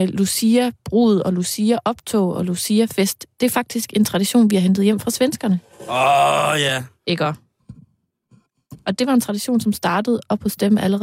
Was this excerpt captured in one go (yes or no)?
no